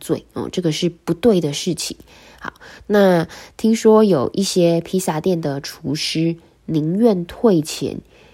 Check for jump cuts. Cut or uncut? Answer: uncut